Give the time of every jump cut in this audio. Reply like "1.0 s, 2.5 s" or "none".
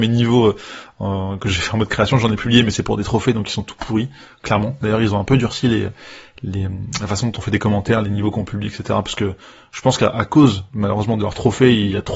none